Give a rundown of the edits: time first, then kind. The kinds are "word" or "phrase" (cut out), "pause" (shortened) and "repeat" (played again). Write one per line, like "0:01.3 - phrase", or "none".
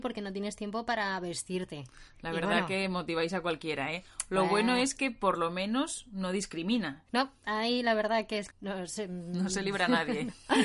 0:07.1 - pause
0:08.5 - phrase